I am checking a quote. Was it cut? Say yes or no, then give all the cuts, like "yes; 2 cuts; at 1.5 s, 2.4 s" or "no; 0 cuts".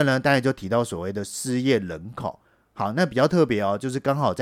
no; 0 cuts